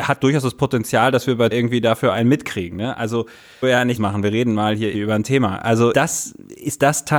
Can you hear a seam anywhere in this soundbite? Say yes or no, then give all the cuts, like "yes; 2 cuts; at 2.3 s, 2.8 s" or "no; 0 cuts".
yes; 5 cuts; at 1.5 s, 3.6 s, 4.0 s, 4.9 s, 5.9 s